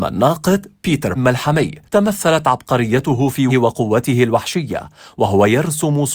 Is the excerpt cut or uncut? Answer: cut